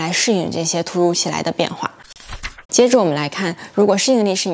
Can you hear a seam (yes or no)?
yes